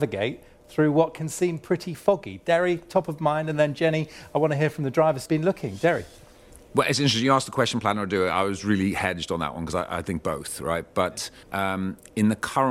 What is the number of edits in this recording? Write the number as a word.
three